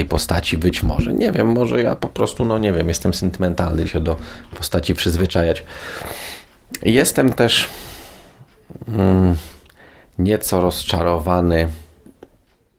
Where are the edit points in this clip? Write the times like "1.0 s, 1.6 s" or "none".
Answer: 3.8 s